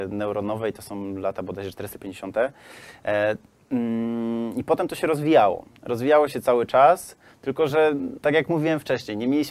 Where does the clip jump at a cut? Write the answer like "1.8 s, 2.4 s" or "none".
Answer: none

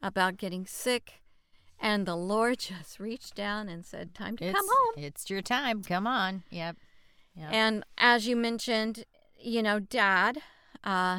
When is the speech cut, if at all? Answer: none

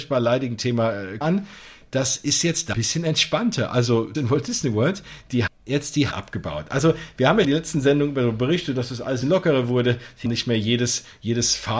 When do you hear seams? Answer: 1.2 s, 2.7 s, 4.1 s, 5.5 s, 6.1 s, 7.4 s, 9.2 s, 10.3 s

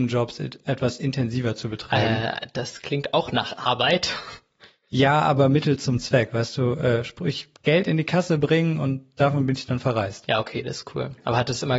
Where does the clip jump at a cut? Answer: none

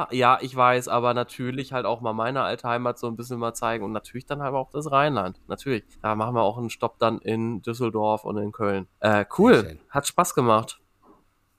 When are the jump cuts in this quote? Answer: 5.9 s, 8.9 s

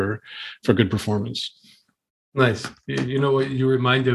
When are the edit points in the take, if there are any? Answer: none

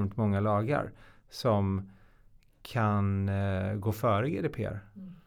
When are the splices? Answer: none

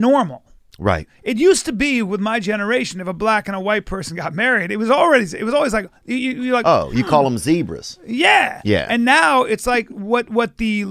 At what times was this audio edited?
none

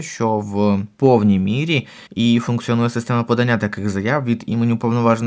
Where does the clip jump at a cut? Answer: 0.9 s, 2.1 s

